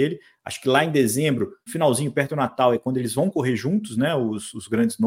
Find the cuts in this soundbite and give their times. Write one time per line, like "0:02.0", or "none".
0:01.7